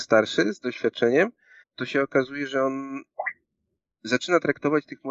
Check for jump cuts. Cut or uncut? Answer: cut